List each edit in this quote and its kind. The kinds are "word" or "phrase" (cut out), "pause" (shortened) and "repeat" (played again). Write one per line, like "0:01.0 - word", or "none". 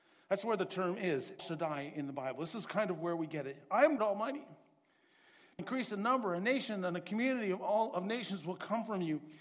0:01.4 - word
0:04.0 - word
0:05.6 - word